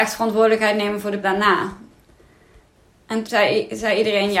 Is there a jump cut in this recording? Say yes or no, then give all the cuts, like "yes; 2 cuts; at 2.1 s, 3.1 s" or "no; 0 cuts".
yes; 2 cuts; at 1.2 s, 3.2 s